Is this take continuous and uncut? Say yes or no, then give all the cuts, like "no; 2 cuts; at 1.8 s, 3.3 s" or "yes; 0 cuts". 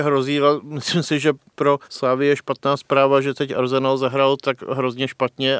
no; 1 cut; at 1.8 s